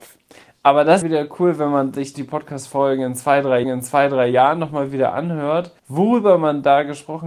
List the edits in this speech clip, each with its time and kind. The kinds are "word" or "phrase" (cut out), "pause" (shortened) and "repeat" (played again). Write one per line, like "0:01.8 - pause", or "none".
0:01.0 - phrase
0:02.1 - phrase
0:03.6 - repeat
0:05.8 - pause

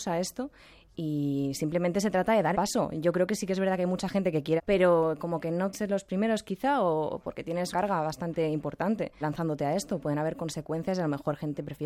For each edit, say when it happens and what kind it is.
0:00.9 - word
0:02.5 - word
0:04.6 - word
0:05.7 - word
0:07.7 - word
0:09.2 - word

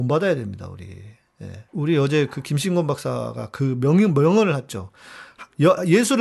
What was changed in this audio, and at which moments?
0:01.7 - pause

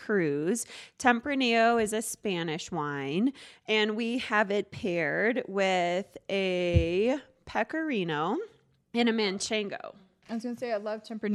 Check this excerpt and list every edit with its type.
none

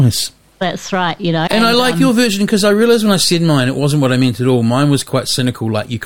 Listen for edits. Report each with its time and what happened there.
0:01.5 - word

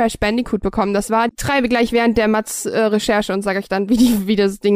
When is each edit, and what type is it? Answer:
0:01.3 - word

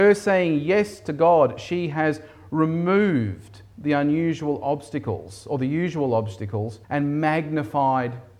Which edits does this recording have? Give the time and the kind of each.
0:06.8 - pause

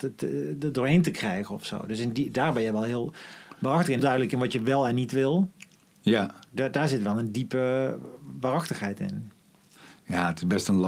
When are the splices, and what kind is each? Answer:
0:04.0 - word

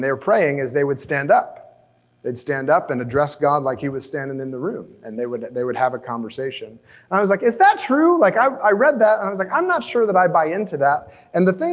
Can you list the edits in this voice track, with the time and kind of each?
none

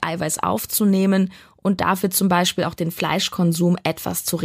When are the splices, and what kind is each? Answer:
none

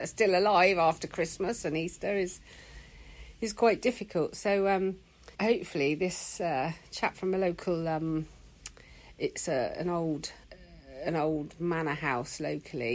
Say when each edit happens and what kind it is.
0:05.3 - pause
0:10.4 - pause

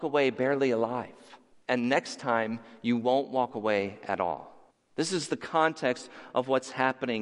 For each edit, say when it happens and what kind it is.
0:01.5 - pause
0:04.7 - pause

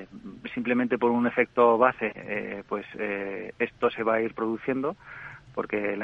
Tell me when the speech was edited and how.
none

